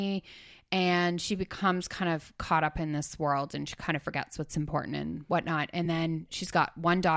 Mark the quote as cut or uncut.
uncut